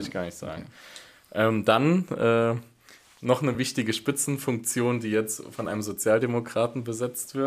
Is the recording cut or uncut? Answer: uncut